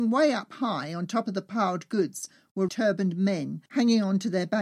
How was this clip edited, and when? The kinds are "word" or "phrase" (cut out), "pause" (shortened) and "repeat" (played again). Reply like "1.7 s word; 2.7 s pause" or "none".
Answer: 2.7 s word; 3.7 s pause